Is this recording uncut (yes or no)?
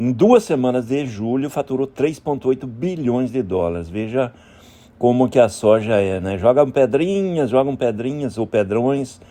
yes